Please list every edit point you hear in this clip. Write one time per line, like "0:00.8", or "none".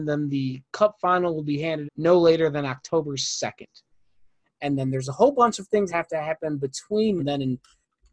0:01.9
0:05.9
0:07.2